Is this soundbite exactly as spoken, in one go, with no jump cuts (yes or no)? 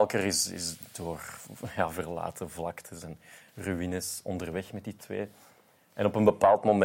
yes